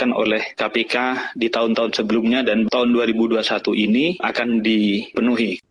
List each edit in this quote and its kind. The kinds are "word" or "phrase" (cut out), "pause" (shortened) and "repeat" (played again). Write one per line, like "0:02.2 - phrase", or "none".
0:04.2 - word